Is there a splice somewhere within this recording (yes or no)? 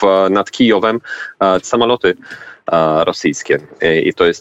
yes